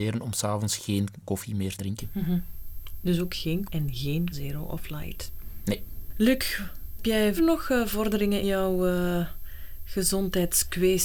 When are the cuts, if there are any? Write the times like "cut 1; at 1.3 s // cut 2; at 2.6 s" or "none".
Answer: cut 1; at 1.2 s // cut 2; at 1.8 s // cut 3; at 3.7 s // cut 4; at 4.3 s // cut 5; at 7.0 s // cut 6; at 7.4 s // cut 7; at 8.4 s